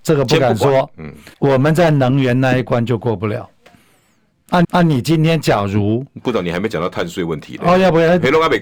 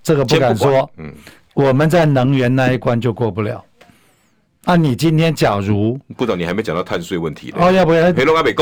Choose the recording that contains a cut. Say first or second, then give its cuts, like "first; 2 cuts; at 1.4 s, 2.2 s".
first; 2 cuts; at 1.3 s, 4.6 s